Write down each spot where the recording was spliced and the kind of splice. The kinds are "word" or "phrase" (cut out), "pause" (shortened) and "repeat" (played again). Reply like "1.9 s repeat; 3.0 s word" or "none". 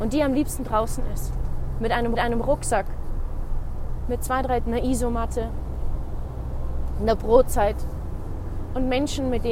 2.2 s repeat; 4.6 s word